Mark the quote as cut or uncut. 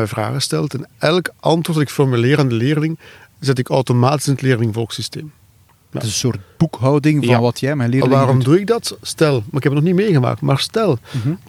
uncut